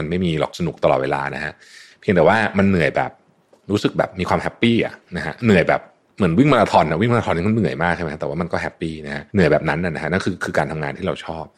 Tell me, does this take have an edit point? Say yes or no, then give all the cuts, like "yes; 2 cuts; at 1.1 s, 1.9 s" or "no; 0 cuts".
yes; 1 cut; at 9.3 s